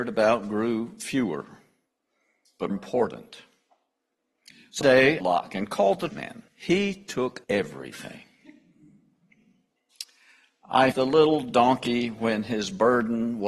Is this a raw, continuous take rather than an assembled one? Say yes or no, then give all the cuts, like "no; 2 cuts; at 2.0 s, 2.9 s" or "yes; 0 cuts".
no; 7 cuts; at 2.7 s, 4.8 s, 5.2 s, 6.1 s, 6.5 s, 7.4 s, 10.9 s